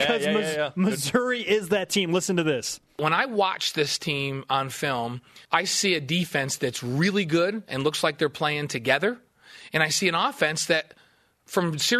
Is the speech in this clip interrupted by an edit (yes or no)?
yes